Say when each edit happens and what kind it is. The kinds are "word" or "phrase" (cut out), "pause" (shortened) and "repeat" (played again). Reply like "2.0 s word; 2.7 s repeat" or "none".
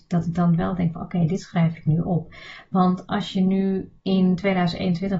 4.0 s pause